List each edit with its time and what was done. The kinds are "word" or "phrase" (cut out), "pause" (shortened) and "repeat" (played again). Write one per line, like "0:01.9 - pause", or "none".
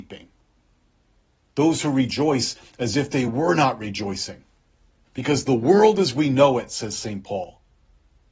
none